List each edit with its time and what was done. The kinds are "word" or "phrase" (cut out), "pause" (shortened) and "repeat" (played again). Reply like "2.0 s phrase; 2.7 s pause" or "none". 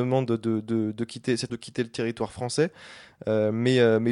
1.5 s word